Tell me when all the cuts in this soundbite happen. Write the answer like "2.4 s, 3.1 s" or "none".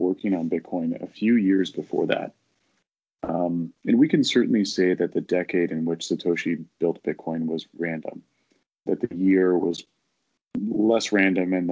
3.8 s, 7.8 s, 8.9 s